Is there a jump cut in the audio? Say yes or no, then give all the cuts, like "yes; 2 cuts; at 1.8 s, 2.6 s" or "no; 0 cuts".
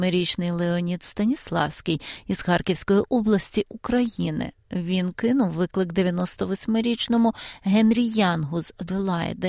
no; 0 cuts